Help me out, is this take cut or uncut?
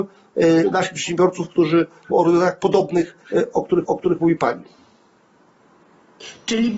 cut